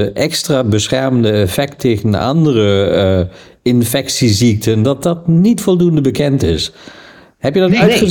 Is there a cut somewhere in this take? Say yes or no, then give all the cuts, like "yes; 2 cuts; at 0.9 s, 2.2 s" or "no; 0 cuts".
no; 0 cuts